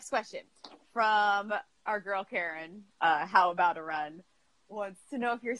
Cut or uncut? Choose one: uncut